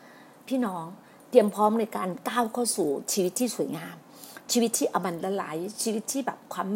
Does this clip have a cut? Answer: no; 0 cuts

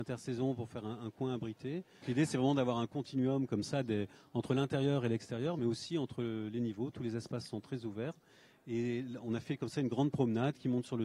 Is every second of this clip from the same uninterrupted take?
yes; 0 cuts

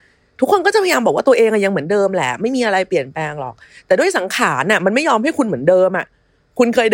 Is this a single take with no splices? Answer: yes; 0 cuts

